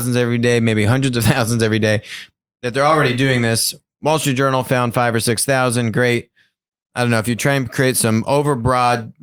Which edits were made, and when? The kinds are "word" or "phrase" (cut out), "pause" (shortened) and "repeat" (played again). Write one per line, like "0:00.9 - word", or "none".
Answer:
none

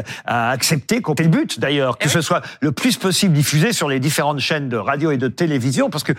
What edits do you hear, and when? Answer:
0:01.2 - phrase

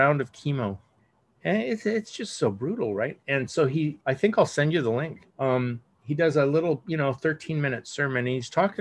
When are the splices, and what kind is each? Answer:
0:01.0 - pause
0:04.0 - pause
0:05.3 - pause

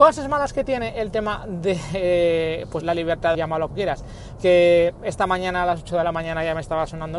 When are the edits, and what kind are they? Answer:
0:02.8 - word
0:03.3 - phrase
0:03.7 - word
0:04.4 - word

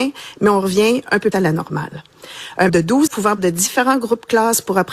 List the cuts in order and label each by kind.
0:01.3 - word
0:02.7 - word
0:03.1 - word
0:03.4 - word

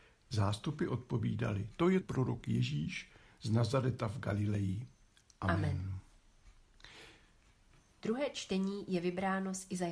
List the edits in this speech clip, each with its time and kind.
0:02.0 - word

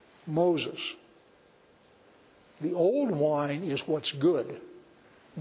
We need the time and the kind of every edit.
none

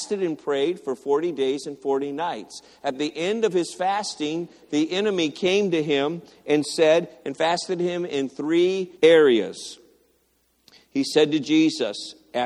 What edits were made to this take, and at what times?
0:09.0 - pause

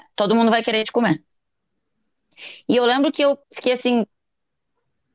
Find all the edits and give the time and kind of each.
0:03.4 - pause

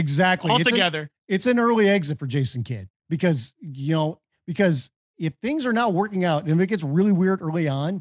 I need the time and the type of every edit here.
none

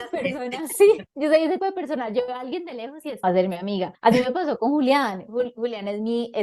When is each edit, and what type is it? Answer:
0:01.1 - pause
0:01.6 - word
0:03.2 - phrase
0:03.9 - pause

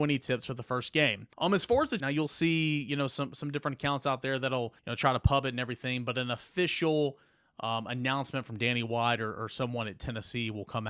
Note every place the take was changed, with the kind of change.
0:01.3 - pause
0:02.0 - phrase
0:04.8 - pause

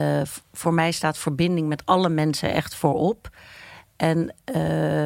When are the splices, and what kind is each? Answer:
none

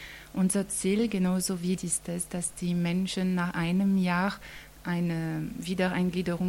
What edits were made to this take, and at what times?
0:01.8 - phrase

